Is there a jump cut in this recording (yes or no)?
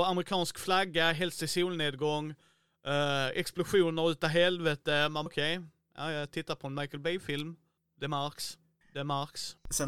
yes